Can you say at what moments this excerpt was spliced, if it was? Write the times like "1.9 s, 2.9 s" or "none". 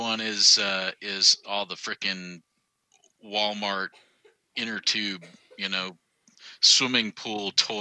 none